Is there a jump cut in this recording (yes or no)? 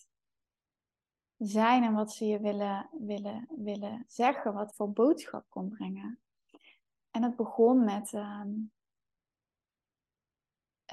yes